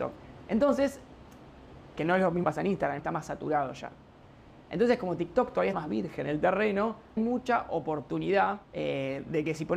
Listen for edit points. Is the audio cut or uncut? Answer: cut